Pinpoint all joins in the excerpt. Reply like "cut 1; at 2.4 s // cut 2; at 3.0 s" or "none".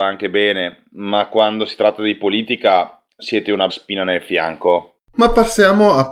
cut 1; at 3.7 s